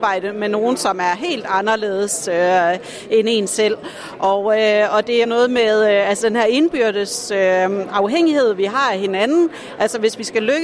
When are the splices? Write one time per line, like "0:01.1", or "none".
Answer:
0:05.2